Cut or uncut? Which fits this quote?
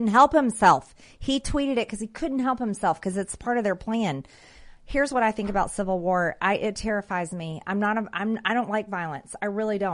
uncut